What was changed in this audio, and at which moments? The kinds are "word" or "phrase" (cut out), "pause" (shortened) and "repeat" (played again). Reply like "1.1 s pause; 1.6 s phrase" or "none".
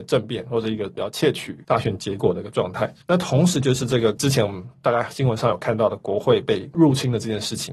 3.0 s pause